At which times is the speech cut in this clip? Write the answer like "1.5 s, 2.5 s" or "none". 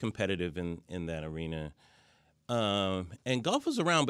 none